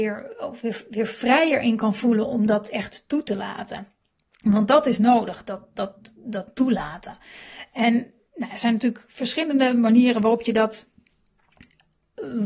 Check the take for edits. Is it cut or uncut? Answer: uncut